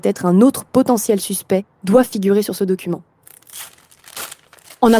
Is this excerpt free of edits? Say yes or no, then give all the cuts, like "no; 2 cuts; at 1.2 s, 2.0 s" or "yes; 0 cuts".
no; 1 cut; at 1.7 s